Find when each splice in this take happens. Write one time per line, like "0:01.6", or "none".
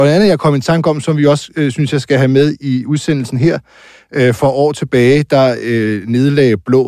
none